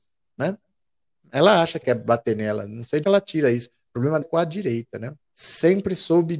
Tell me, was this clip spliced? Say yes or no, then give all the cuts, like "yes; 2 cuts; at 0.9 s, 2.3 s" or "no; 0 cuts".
yes; 4 cuts; at 1.8 s, 3.0 s, 4.2 s, 5.2 s